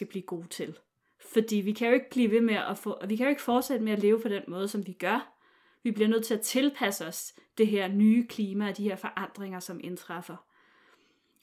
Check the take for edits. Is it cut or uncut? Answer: uncut